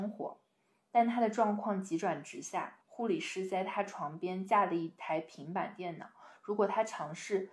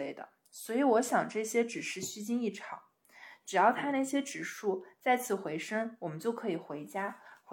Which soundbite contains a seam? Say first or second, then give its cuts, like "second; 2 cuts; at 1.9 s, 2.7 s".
first; 1 cut; at 2.8 s